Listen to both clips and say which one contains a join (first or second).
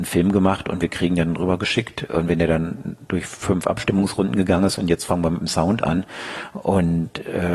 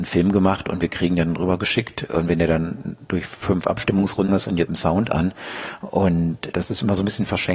second